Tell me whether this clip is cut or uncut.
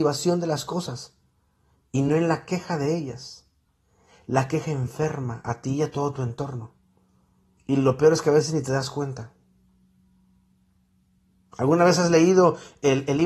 uncut